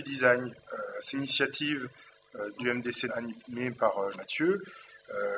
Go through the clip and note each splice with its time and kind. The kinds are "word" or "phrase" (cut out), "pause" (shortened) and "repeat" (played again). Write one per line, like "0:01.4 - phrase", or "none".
0:01.1 - word
0:02.6 - word
0:03.1 - phrase
0:04.1 - word